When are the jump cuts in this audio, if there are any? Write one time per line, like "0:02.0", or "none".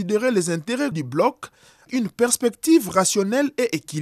0:00.9
0:01.9